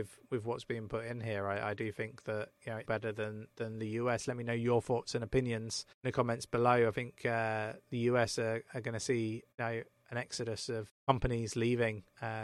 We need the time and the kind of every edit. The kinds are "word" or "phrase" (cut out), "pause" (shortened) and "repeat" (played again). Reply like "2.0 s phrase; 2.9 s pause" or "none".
2.8 s word; 5.9 s pause; 9.5 s pause; 10.9 s word